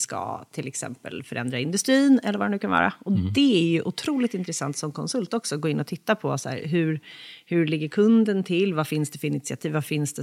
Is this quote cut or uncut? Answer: uncut